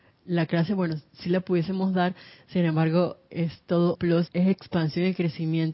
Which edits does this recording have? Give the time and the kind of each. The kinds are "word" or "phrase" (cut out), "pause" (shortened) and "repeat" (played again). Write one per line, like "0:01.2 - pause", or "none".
0:03.3 - word
0:03.9 - word
0:04.3 - word